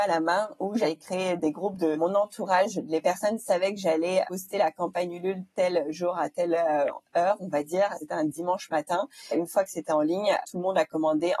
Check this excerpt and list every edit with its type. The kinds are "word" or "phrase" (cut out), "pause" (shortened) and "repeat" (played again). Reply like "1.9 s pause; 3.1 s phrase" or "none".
none